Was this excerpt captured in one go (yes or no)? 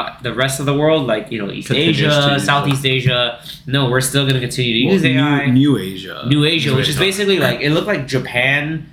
yes